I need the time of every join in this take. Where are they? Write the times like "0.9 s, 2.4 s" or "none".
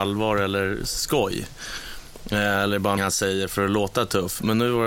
3.0 s